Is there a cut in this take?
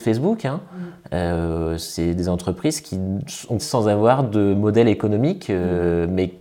yes; 1 cut; at 3.6 s

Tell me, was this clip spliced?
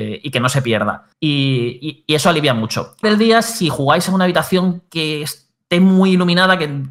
yes; 2 cuts; at 1.1 s, 3.0 s

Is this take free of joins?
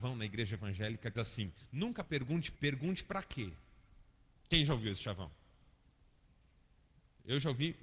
no; 2 cuts; at 1.2 s, 2.6 s

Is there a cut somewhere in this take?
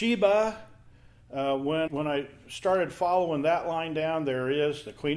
yes; 1 cut; at 1.9 s

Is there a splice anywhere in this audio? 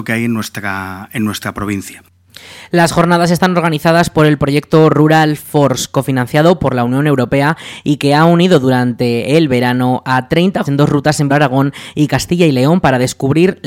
yes; 2 cuts; at 10.6 s, 11.3 s

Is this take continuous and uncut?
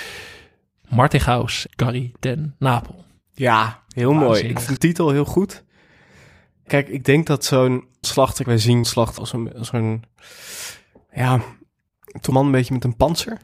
no; 8 cuts; at 1.7 s, 4.8 s, 6.7 s, 8.0 s, 8.4 s, 8.8 s, 9.2 s, 12.3 s

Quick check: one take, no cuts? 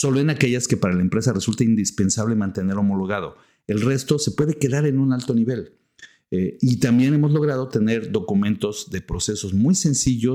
yes; 0 cuts

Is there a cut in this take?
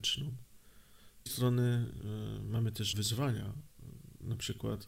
yes; 2 cuts; at 1.3 s, 2.9 s

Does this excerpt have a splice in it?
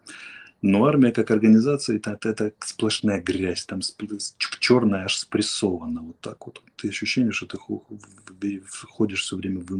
no; 0 cuts

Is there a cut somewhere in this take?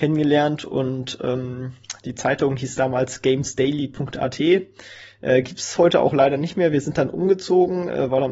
no; 0 cuts

